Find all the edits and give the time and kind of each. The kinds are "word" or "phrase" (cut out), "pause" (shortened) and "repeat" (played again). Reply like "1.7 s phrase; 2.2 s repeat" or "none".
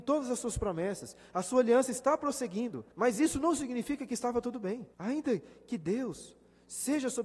2.9 s pause; 4.9 s pause